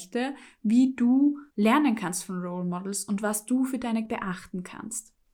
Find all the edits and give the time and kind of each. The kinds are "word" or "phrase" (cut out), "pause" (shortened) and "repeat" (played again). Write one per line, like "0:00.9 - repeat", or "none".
0:01.5 - pause
0:04.1 - word